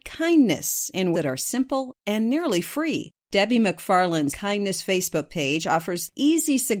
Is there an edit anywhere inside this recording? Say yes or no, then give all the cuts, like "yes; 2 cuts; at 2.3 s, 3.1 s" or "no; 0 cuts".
yes; 2 cuts; at 1.1 s, 4.3 s